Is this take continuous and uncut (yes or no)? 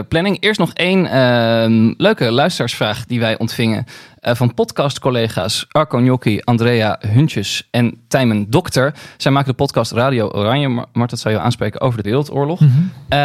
no